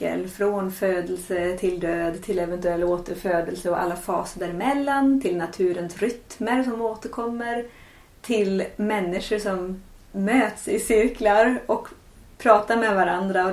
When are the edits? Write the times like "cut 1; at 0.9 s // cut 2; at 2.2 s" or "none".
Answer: none